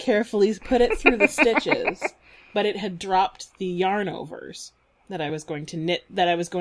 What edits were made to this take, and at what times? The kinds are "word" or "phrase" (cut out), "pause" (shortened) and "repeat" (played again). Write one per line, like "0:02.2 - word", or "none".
none

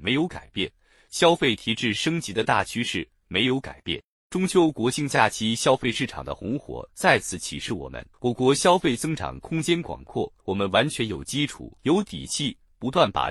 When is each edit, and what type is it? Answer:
0:08.1 - pause
0:10.4 - pause
0:11.8 - pause

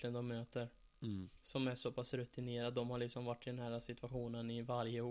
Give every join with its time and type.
0:01.4 - pause

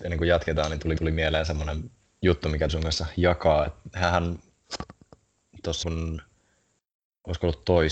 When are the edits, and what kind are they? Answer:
0:01.0 - repeat
0:02.0 - pause
0:02.7 - word
0:05.8 - word

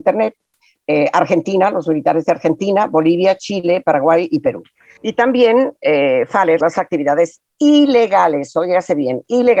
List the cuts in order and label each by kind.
0:06.6 - word

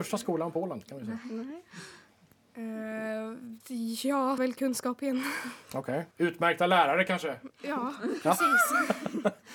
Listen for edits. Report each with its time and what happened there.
0:03.6 - pause
0:04.4 - word
0:06.1 - pause

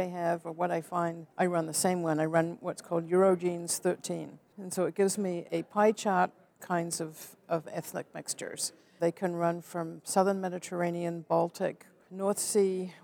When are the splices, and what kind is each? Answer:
0:01.3 - pause
0:06.6 - phrase

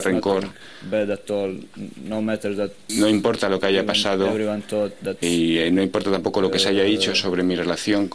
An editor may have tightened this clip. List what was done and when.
0:02.9 - word
0:05.2 - word

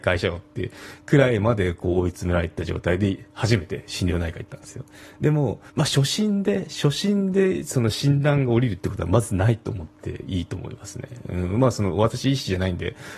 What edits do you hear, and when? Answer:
0:05.7 - pause

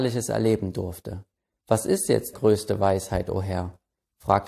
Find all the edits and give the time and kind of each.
0:01.4 - pause
0:02.3 - word

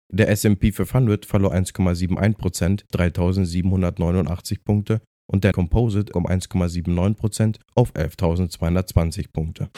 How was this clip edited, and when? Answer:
0:02.9 - word
0:05.5 - word
0:06.1 - word
0:07.6 - pause

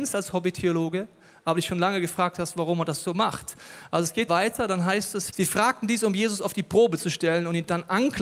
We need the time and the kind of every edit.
0:04.3 - word
0:05.3 - word

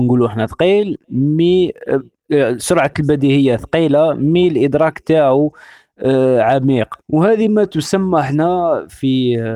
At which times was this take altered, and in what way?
0:07.0 - pause

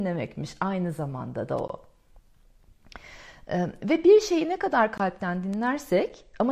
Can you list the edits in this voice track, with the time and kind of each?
none

